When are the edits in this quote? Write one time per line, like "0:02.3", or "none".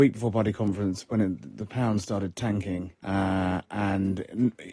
0:02.9